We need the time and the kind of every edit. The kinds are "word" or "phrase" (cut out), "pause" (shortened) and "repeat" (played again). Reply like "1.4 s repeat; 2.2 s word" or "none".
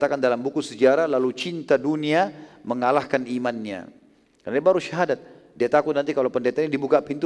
none

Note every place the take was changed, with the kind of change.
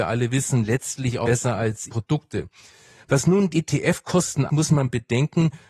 1.2 s word; 1.9 s word; 3.5 s word; 4.5 s word

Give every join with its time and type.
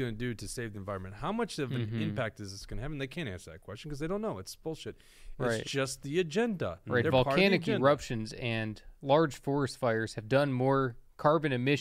9.0 s pause

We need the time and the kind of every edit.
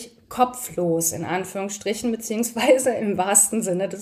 none

